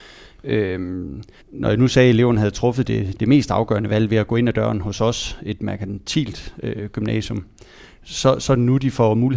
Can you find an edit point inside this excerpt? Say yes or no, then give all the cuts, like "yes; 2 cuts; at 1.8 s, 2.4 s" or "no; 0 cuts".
yes; 1 cut; at 1.4 s